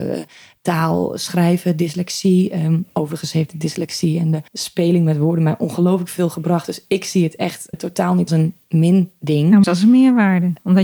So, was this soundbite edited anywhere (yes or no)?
yes